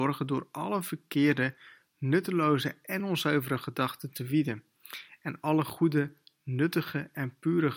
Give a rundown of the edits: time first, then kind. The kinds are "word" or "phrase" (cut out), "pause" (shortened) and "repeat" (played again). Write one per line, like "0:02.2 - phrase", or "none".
none